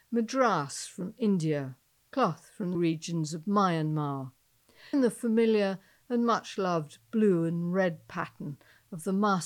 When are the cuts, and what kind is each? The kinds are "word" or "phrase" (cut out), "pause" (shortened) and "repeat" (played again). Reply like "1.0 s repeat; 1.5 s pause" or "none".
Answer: 2.7 s word; 4.9 s word